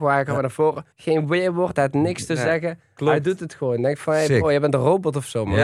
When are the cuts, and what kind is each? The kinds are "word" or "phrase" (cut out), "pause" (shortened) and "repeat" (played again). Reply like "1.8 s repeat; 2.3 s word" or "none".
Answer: 0.9 s pause